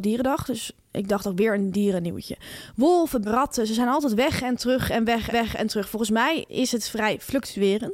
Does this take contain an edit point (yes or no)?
yes